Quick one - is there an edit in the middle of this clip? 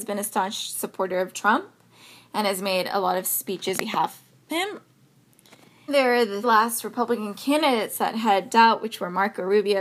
yes; 6 cuts; at 1.3 s, 3.8 s, 4.5 s, 5.9 s, 6.4 s, 8.5 s

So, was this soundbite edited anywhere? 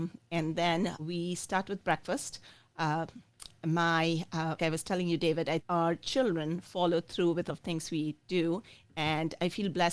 yes; 4 cuts; at 1.0 s, 4.6 s, 5.6 s, 7.5 s

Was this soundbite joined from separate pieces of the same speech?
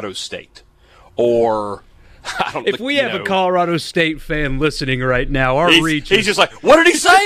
no; 0 cuts

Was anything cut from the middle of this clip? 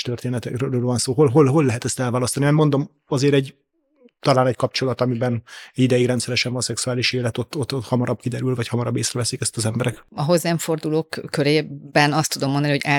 no; 0 cuts

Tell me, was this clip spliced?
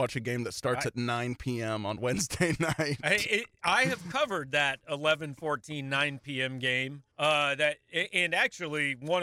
yes; 1 cut; at 7.1 s

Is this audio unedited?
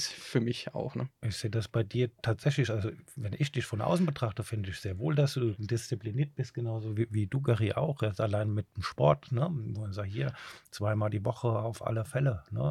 no; 1 cut; at 5.5 s

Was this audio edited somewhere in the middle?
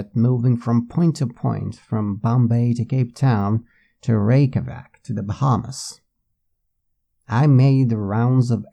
no; 0 cuts

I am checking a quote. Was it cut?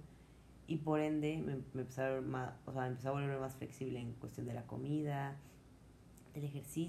no; 0 cuts

